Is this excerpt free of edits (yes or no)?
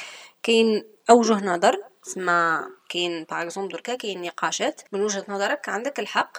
no